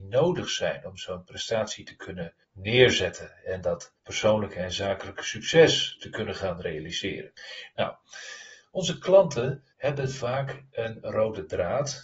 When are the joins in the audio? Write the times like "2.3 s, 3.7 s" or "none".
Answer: 2.4 s, 4.0 s, 9.7 s